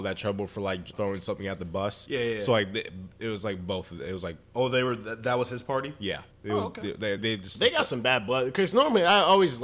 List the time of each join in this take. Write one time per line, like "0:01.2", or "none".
0:00.9
0:04.4
0:06.3
0:07.2